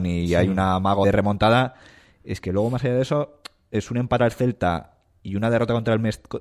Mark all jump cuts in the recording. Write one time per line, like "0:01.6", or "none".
0:01.0
0:04.2

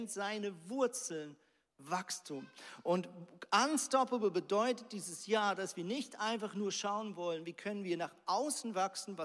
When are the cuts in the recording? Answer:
none

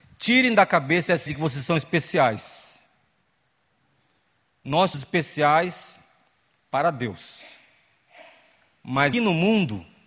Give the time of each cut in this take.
0:01.3
0:04.9
0:09.1

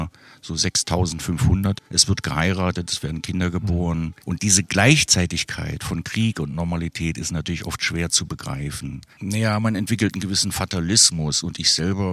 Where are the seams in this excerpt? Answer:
0:01.9
0:04.2
0:09.1

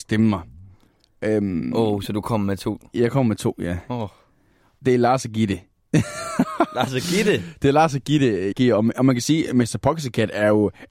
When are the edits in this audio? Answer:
0:08.5

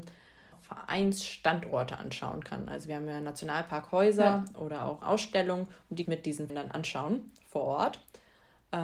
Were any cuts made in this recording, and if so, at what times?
0:05.0
0:06.0
0:06.5

